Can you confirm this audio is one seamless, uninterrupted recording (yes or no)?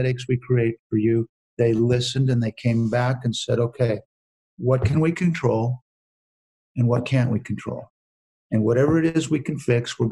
yes